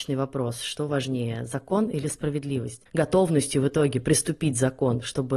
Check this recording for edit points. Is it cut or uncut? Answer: cut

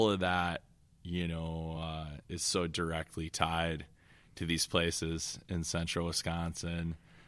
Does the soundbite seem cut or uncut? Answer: uncut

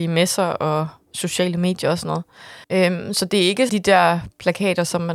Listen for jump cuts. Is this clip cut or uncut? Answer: cut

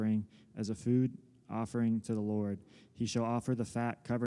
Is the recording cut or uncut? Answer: uncut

